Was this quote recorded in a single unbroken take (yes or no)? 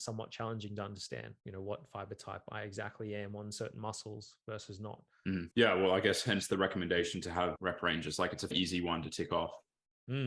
no